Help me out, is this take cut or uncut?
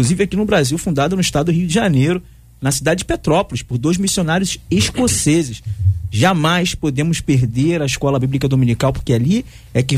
uncut